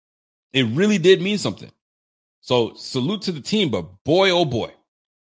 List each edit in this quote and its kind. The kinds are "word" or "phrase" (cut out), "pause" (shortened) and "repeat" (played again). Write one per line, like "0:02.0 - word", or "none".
none